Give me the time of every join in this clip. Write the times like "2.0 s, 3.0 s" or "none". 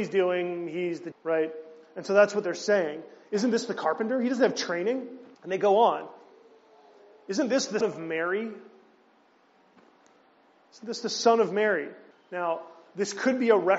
1.1 s, 5.3 s, 7.8 s, 12.1 s